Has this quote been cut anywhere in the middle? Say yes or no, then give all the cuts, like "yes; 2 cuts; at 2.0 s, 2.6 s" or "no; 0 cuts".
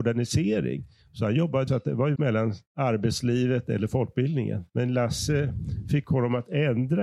yes; 4 cuts; at 1.7 s, 2.2 s, 2.7 s, 4.7 s